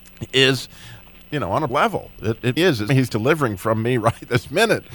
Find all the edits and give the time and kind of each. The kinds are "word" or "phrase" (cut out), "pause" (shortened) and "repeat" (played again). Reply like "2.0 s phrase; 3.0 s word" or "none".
1.1 s word; 1.7 s word; 2.6 s word; 2.9 s word